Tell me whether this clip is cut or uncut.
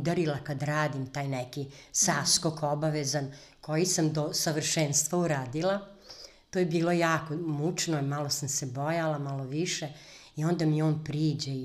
uncut